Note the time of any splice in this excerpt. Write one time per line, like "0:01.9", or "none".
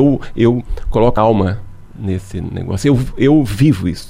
0:01.2